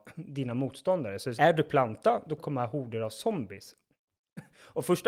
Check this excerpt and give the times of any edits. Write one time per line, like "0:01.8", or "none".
0:01.4
0:02.4